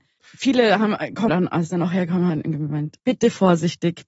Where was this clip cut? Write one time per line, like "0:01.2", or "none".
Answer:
0:01.3
0:02.3
0:03.0